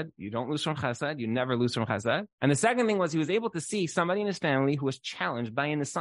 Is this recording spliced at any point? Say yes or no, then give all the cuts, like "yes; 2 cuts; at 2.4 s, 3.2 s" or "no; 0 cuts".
yes; 1 cut; at 2.3 s